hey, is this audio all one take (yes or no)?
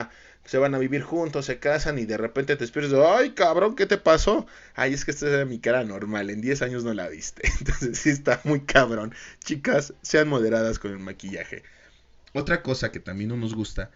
yes